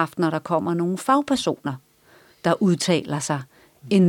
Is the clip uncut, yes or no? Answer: yes